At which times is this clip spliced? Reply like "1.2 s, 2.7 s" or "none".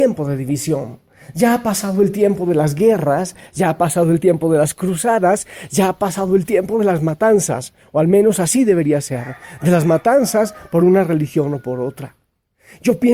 none